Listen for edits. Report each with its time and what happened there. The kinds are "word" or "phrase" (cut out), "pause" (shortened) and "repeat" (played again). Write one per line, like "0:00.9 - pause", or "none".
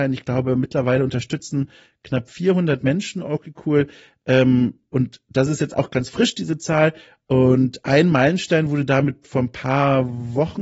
none